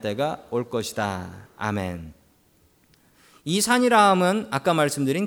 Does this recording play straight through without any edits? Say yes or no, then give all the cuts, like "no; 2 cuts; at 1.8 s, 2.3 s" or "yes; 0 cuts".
yes; 0 cuts